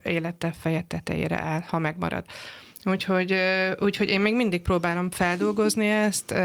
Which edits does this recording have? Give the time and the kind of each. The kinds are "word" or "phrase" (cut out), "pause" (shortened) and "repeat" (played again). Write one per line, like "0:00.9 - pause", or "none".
none